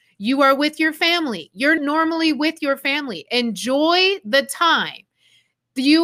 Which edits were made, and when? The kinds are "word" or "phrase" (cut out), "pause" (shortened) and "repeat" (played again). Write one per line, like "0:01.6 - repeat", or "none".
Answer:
0:01.8 - word